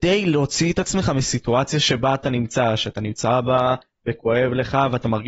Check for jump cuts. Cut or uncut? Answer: uncut